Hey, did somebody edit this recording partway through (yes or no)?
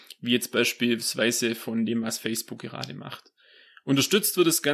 no